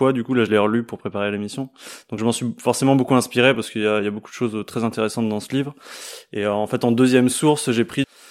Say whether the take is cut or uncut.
uncut